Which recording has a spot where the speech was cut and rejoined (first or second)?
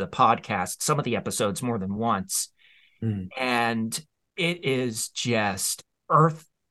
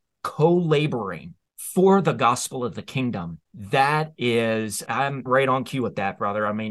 second